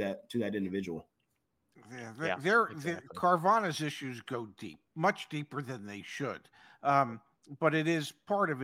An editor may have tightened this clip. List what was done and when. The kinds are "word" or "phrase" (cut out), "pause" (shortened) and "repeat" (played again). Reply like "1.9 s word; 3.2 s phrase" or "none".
1.6 s pause